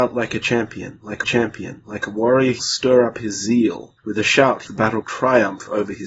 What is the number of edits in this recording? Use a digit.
5